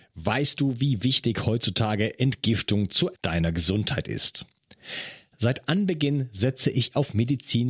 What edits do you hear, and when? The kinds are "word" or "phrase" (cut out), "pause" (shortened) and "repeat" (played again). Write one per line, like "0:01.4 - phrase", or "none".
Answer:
0:03.1 - word